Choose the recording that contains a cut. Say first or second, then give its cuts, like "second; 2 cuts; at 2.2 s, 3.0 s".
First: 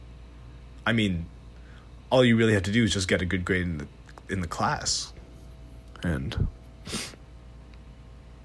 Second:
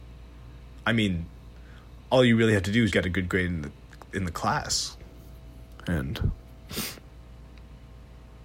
second; 1 cut; at 2.9 s